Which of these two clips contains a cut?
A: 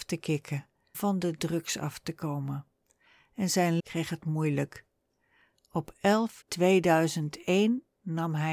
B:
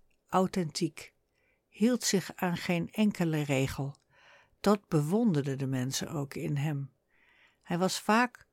A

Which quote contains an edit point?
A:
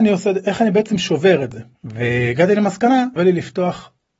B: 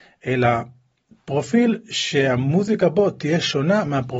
A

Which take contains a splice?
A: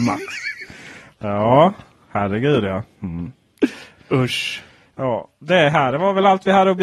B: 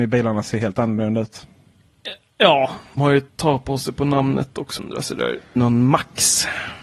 B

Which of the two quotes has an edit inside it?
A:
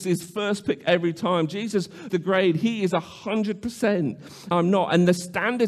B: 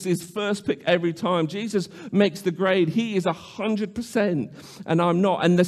A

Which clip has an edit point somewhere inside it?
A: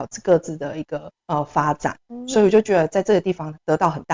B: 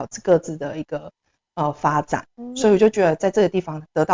A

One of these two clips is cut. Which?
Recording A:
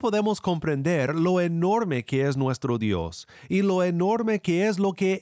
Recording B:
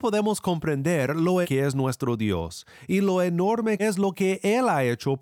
B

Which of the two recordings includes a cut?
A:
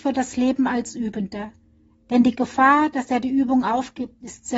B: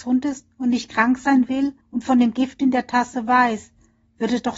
B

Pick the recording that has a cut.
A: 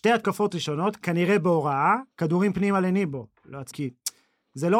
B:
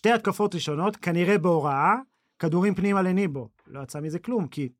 A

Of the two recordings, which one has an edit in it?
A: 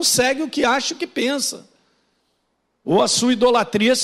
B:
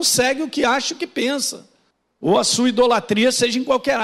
B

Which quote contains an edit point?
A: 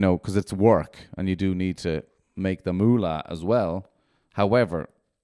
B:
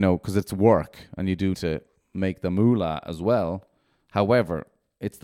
B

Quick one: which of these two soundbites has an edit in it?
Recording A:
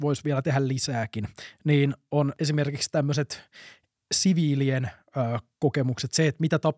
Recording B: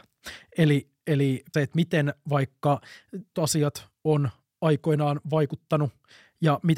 B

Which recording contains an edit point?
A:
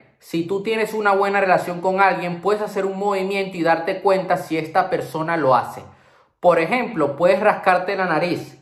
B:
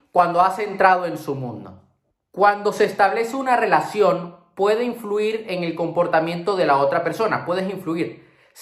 B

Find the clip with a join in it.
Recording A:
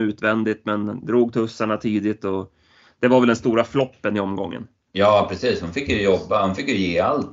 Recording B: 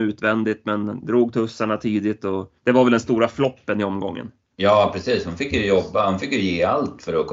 B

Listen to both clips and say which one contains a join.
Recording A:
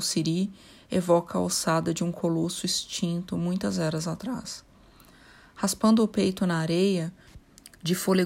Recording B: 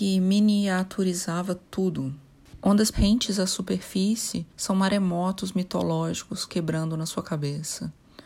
B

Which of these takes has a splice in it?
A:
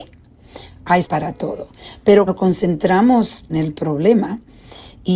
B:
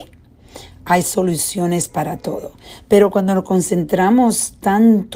A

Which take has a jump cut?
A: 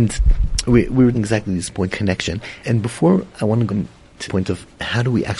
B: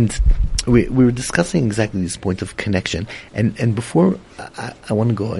A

